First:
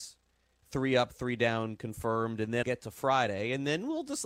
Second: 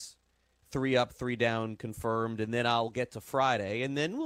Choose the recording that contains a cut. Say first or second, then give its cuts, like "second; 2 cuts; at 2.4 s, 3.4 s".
first; 1 cut; at 2.6 s